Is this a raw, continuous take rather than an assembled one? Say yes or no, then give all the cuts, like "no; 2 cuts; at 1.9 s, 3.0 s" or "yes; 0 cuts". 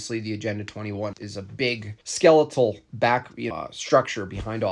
no; 3 cuts; at 1.1 s, 2.0 s, 3.5 s